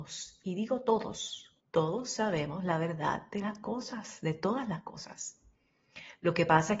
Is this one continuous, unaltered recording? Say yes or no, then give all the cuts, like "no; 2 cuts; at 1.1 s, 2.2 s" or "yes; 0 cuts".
no; 1 cut; at 1.6 s